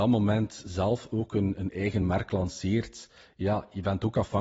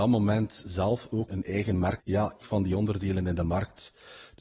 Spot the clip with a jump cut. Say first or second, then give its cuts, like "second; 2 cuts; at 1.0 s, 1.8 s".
second; 3 cuts; at 1.3 s, 2.0 s, 2.4 s